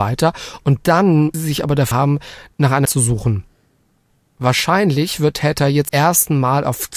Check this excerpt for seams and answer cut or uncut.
cut